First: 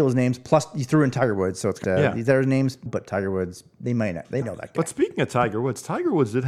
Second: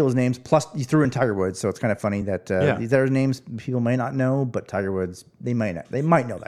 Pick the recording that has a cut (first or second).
first